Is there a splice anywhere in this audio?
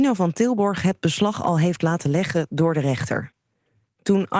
no; 0 cuts

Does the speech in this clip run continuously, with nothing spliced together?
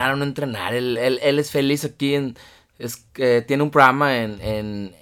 yes; 0 cuts

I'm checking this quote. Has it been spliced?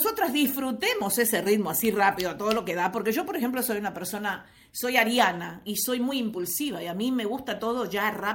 no; 0 cuts

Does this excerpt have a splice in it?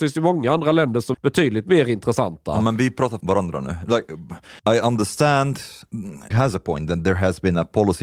yes; 4 cuts; at 1.1 s, 3.2 s, 4.6 s, 6.3 s

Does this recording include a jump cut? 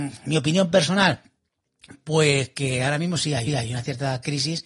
yes; 1 cut; at 3.5 s

